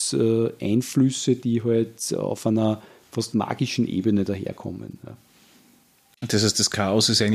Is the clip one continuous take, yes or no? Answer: yes